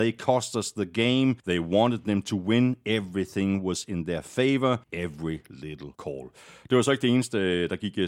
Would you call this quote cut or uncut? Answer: cut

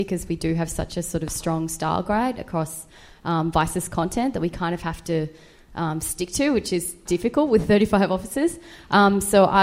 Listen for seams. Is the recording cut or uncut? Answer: cut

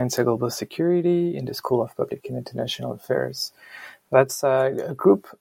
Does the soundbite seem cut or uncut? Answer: uncut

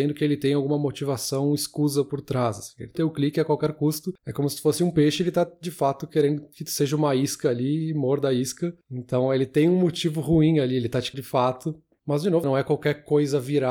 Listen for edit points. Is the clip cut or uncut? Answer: cut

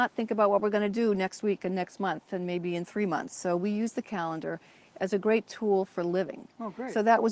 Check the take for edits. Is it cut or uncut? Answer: uncut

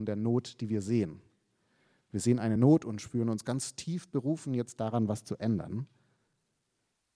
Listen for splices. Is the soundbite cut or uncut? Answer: uncut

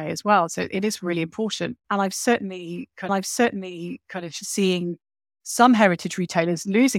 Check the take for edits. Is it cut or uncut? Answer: cut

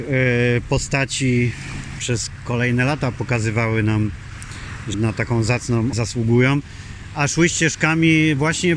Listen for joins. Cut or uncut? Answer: cut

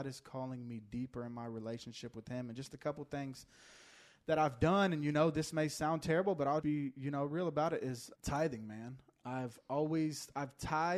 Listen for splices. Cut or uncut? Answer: cut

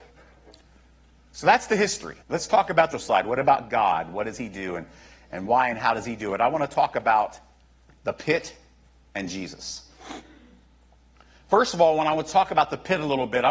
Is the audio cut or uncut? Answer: cut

